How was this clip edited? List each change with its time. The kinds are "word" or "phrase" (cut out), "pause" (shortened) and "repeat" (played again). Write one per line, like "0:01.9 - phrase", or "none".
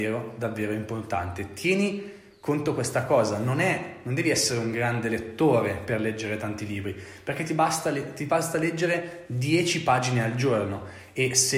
none

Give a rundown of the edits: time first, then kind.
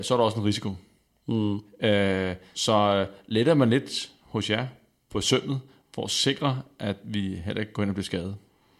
0:02.5 - word

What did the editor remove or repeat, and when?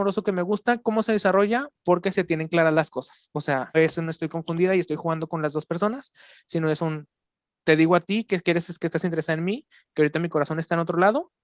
0:03.7 - word

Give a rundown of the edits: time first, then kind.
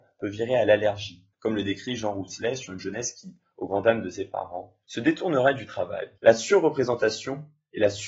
0:01.3 - pause
0:04.8 - pause
0:06.2 - pause

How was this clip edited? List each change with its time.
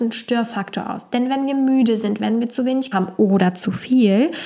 0:02.2 - phrase
0:02.9 - word

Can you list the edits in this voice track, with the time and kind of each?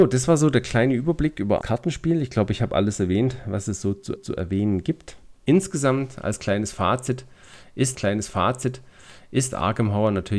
0:01.6 - phrase
0:04.2 - repeat
0:07.9 - repeat

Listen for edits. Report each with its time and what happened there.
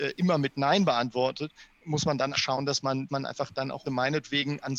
0:01.8 - word
0:02.3 - word
0:03.1 - word
0:03.9 - word

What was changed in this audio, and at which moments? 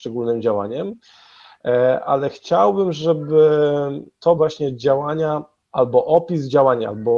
0:04.4 - word

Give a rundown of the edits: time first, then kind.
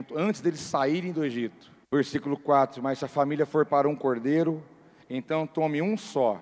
0:01.8 - pause
0:03.7 - word

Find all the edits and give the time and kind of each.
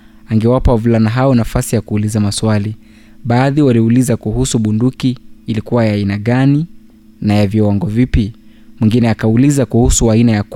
none

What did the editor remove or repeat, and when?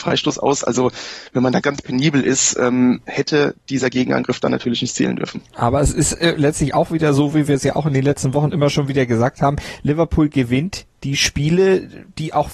0:01.6 - word

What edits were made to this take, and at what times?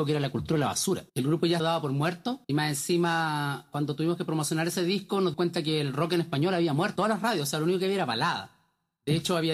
0:01.1 - pause
0:01.6 - phrase
0:02.4 - pause
0:05.3 - word
0:07.0 - word

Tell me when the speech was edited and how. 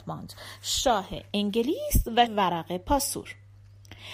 0:02.3 - word

